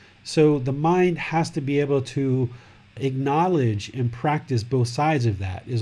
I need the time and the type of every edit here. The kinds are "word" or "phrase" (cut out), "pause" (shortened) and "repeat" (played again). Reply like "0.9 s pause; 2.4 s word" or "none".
none